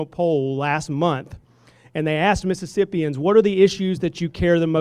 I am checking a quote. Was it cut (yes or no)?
no